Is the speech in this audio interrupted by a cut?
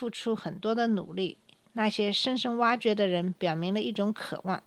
no; 0 cuts

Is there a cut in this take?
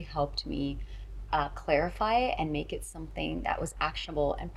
no; 0 cuts

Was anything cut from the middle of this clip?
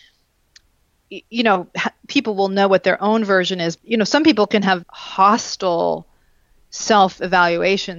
yes; 2 cuts; at 3.8 s, 4.8 s

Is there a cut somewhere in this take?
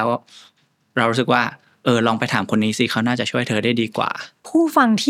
no; 0 cuts

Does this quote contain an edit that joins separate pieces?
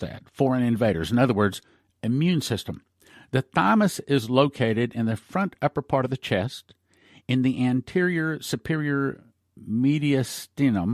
no; 0 cuts

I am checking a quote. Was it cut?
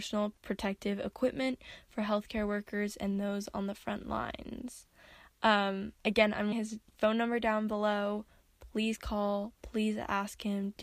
yes; 3 cuts; at 6.0 s, 6.5 s, 6.9 s

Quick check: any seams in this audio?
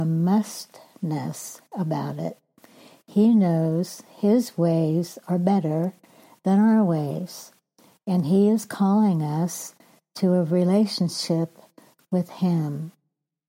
no; 0 cuts

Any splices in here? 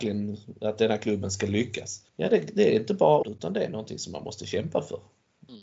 yes; 2 cuts; at 2.1 s, 3.2 s

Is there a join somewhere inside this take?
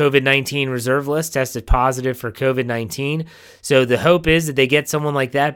no; 0 cuts

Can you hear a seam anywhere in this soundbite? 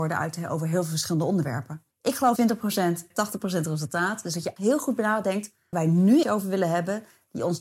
yes; 6 cuts; at 1.9 s, 2.4 s, 3.1 s, 4.6 s, 5.7 s, 6.2 s

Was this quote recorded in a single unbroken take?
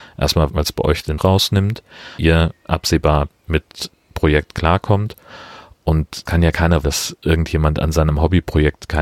no; 6 cuts; at 1.2 s, 2.2 s, 3.3 s, 3.9 s, 6.3 s, 6.8 s

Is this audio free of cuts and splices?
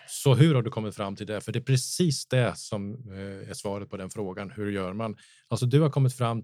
yes; 0 cuts

